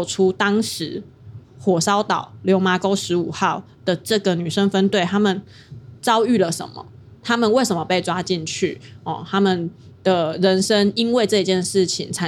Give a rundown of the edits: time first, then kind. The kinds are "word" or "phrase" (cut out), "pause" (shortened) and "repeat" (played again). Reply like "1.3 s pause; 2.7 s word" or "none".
none